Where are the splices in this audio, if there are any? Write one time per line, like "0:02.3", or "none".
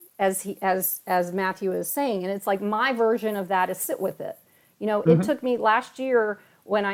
none